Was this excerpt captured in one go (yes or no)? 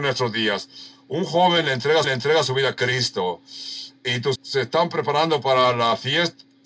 no